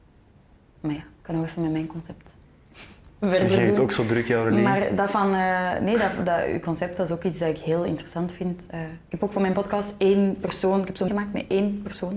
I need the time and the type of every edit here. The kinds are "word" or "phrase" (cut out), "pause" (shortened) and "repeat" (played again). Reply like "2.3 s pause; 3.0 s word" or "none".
11.1 s word